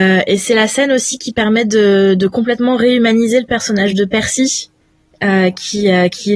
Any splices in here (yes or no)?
no